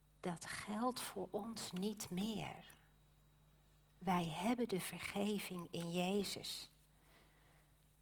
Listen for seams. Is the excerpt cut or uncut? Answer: uncut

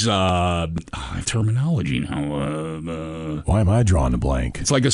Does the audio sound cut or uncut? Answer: cut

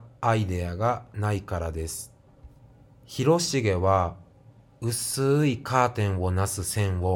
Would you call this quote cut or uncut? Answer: cut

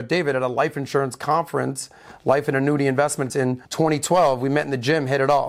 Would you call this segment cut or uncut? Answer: cut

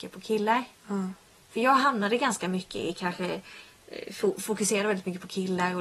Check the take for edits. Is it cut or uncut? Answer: uncut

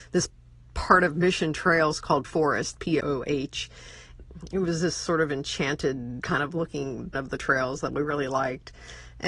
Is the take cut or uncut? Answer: cut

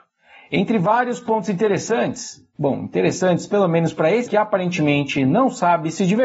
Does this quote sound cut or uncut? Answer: cut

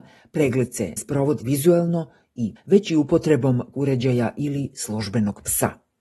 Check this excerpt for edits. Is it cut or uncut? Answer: cut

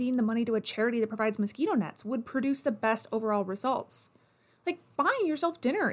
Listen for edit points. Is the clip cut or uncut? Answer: uncut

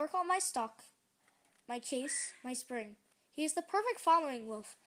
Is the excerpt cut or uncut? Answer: uncut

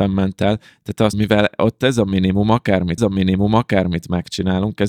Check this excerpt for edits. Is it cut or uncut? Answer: cut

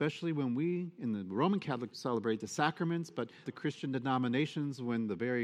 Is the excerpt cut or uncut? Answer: cut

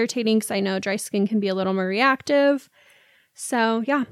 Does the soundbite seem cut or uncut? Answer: uncut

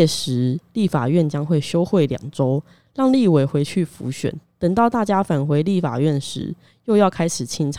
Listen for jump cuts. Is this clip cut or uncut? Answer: uncut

